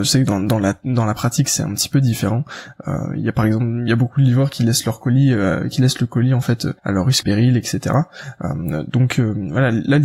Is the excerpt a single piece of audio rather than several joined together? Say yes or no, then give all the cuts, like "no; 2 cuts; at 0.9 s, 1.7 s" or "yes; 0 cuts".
no; 2 cuts; at 6.8 s, 7.2 s